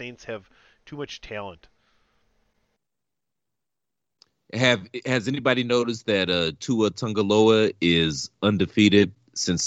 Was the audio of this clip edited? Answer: no; 0 cuts

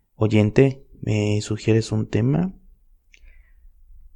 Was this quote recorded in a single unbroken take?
yes; 0 cuts

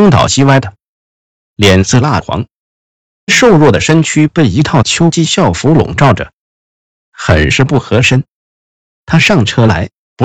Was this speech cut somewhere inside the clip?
no; 0 cuts

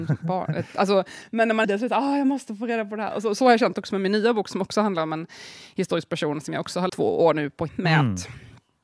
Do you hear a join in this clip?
yes; 3 cuts; at 1.6 s, 6.9 s, 7.7 s

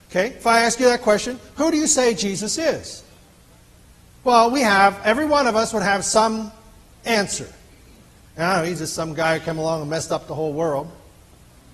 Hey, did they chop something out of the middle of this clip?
no; 0 cuts

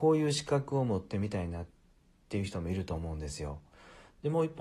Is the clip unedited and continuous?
yes; 0 cuts

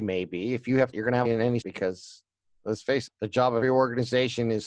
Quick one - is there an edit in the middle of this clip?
yes; 5 cuts; at 0.9 s, 1.2 s, 1.6 s, 3.1 s, 3.6 s

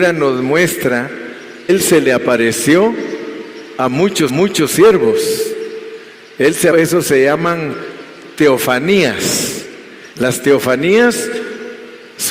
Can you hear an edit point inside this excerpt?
yes; 4 cuts; at 1.7 s, 4.3 s, 6.7 s, 10.1 s

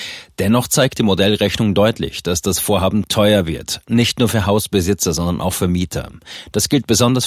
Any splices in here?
no; 0 cuts

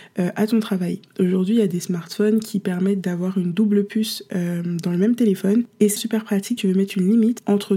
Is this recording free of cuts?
no; 2 cuts; at 6.0 s, 6.6 s

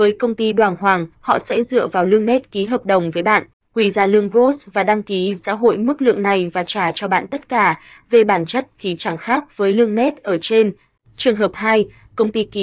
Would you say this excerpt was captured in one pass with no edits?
no; 2 cuts; at 1.1 s, 5.4 s

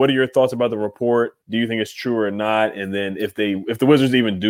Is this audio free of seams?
no; 1 cut; at 1.4 s

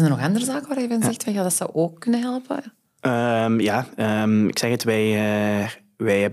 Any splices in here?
no; 0 cuts

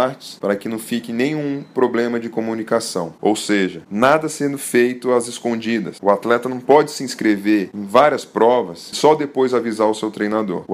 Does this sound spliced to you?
yes; 1 cut; at 8.9 s

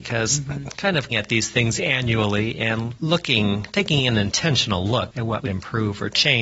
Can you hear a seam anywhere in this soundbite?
yes; 2 cuts; at 1.1 s, 5.5 s

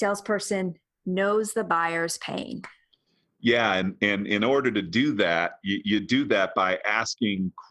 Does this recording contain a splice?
no; 0 cuts

